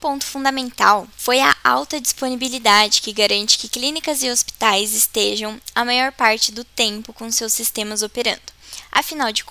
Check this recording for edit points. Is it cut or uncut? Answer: uncut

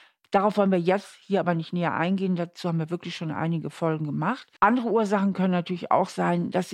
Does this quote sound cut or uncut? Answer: cut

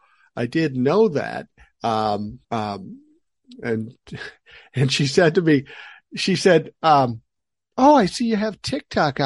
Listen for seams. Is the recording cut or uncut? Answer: cut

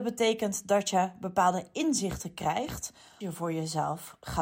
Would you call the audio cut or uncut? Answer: cut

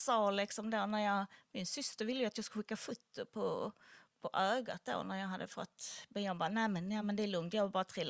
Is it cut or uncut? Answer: uncut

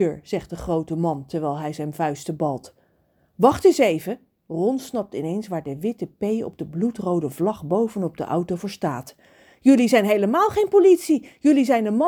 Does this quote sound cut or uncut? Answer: uncut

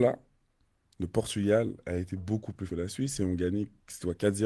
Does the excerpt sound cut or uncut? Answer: cut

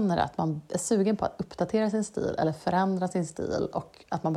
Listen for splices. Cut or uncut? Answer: uncut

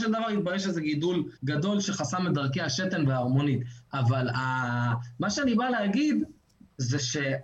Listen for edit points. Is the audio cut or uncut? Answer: cut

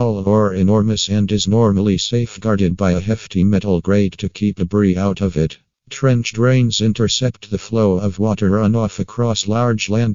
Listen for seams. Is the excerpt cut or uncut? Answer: uncut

